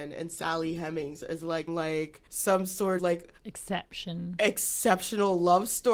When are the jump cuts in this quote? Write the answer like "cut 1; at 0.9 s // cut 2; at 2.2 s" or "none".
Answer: cut 1; at 1.7 s // cut 2; at 2.3 s // cut 3; at 3.0 s // cut 4; at 3.4 s